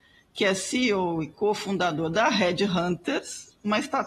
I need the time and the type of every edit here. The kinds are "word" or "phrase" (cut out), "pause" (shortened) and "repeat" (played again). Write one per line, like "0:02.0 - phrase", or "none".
none